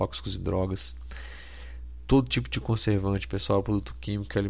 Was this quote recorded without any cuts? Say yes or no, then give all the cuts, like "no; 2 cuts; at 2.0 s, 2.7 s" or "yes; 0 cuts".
yes; 0 cuts